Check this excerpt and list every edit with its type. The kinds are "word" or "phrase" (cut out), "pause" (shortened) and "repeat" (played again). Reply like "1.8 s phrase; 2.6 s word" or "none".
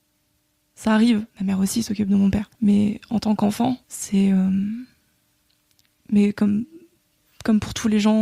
1.3 s pause; 2.5 s pause; 3.8 s pause